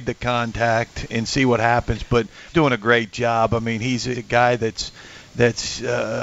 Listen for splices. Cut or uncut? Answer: cut